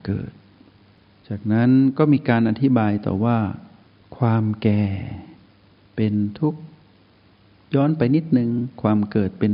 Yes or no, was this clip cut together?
no